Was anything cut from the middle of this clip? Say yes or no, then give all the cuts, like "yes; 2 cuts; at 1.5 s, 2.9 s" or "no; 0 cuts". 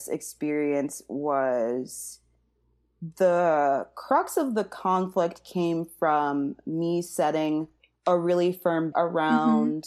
yes; 1 cut; at 8.9 s